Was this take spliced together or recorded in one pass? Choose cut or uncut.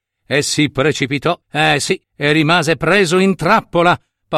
cut